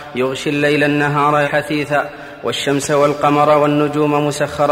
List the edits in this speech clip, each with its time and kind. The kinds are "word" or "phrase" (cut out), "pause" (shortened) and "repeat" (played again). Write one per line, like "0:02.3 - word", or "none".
0:01.4 - word